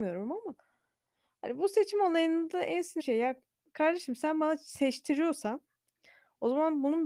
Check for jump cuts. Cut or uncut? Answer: cut